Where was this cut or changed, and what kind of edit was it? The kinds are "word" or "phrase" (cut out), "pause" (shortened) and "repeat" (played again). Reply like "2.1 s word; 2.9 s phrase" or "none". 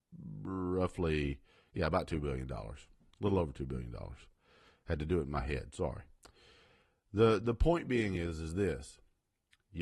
none